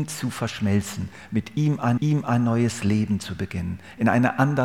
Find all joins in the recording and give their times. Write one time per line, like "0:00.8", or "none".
0:02.0